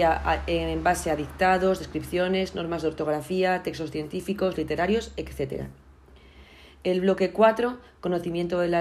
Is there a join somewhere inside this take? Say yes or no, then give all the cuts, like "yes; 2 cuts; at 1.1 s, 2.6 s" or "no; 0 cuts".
no; 0 cuts